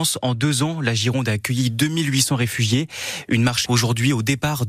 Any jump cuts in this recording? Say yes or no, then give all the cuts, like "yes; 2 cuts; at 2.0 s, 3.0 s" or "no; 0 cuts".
yes; 1 cut; at 3.7 s